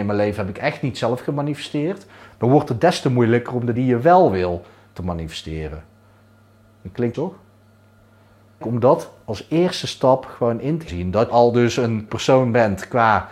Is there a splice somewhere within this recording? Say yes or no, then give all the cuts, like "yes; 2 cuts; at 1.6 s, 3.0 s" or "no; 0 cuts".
yes; 6 cuts; at 3.7 s, 7.1 s, 8.6 s, 10.9 s, 11.3 s, 12.1 s